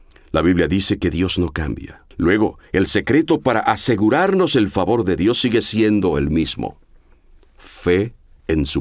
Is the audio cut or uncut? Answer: cut